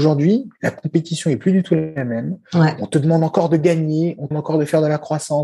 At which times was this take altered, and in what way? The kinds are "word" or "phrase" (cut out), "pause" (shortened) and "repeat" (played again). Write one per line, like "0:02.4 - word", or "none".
0:04.3 - word